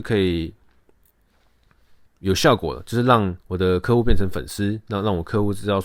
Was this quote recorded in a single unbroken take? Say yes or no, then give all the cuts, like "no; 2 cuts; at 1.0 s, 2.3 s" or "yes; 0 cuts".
no; 2 cuts; at 2.1 s, 3.4 s